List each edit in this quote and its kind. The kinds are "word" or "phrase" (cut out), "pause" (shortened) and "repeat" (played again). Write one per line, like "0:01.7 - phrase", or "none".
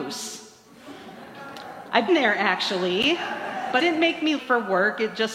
0:02.1 - word
0:03.8 - word
0:04.4 - word